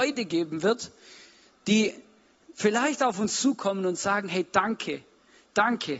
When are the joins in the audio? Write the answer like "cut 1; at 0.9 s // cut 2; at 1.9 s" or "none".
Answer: none